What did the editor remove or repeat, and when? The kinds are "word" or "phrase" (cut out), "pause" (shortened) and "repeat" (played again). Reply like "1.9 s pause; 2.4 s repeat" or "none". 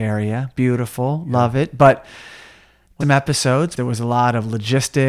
3.0 s word; 3.8 s word